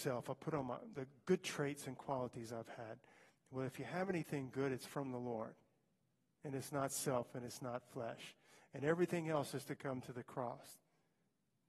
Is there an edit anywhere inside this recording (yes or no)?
no